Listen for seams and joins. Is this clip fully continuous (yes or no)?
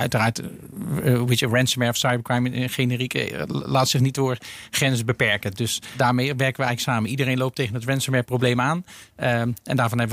yes